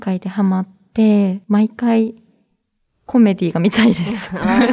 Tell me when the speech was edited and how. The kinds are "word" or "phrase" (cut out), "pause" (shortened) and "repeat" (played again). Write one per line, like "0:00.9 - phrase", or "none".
0:01.4 - pause